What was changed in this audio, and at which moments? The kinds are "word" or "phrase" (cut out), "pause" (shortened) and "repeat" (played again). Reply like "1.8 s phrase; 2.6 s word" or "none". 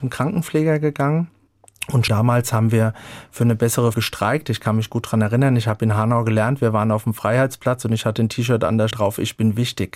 2.1 s word; 3.9 s word; 8.9 s word